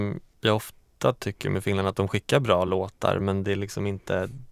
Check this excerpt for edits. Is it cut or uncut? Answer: uncut